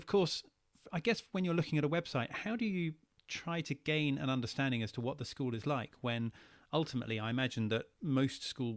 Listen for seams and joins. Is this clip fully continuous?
yes; 0 cuts

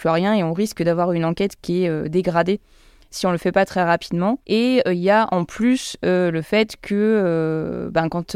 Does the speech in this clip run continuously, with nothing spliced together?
yes; 0 cuts

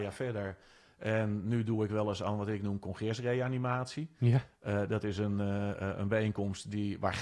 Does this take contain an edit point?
no; 0 cuts

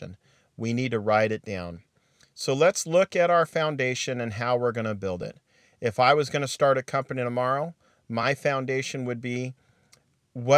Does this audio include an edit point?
no; 0 cuts

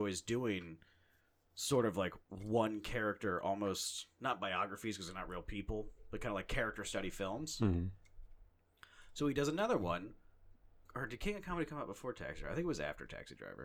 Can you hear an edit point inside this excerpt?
yes; 1 cut; at 2.2 s

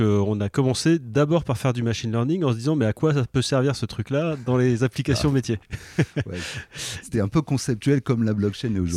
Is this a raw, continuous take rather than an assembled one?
yes; 0 cuts

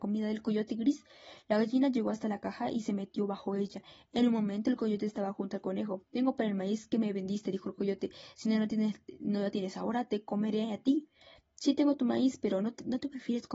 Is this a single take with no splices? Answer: yes; 0 cuts

